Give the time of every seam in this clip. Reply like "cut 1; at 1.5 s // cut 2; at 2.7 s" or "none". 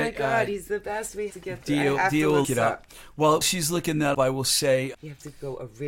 cut 1; at 1.3 s // cut 2; at 2.4 s // cut 3; at 3.4 s // cut 4; at 4.1 s // cut 5; at 4.9 s